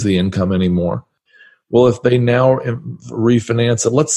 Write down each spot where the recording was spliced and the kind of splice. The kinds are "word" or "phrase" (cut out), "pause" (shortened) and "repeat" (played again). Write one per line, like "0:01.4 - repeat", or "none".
none